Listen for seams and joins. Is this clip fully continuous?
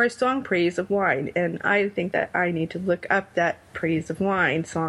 yes; 0 cuts

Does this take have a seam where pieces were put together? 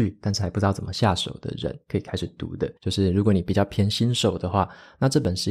yes; 1 cut; at 2.8 s

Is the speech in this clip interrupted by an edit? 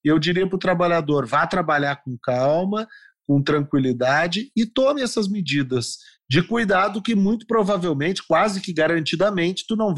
no; 0 cuts

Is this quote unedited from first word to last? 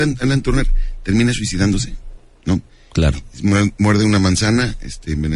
yes; 0 cuts

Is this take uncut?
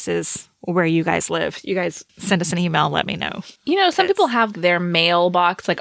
no; 2 cuts; at 2.1 s, 4.5 s

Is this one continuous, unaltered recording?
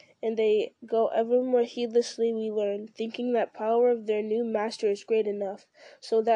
yes; 0 cuts

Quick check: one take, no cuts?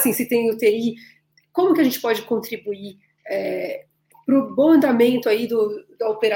yes; 0 cuts

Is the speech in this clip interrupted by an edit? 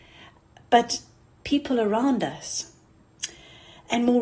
no; 0 cuts

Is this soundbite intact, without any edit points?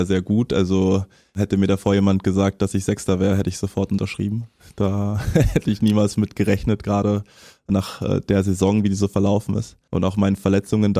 yes; 0 cuts

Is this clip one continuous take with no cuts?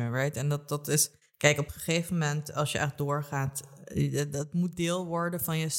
no; 1 cut; at 1.2 s

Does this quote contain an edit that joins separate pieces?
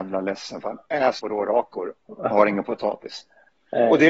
yes; 2 cuts; at 1.2 s, 2.3 s

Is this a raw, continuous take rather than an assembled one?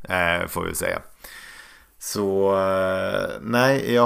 yes; 0 cuts

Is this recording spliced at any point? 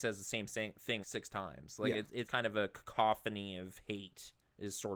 yes; 2 cuts; at 1.0 s, 2.3 s

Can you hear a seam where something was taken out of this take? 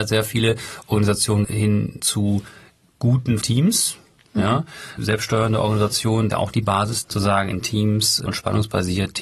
yes; 8 cuts; at 1.4 s, 2.0 s, 3.4 s, 5.0 s, 6.3 s, 7.0 s, 7.6 s, 8.3 s

